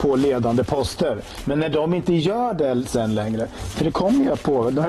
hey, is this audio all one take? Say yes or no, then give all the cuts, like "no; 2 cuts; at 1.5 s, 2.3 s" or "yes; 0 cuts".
yes; 0 cuts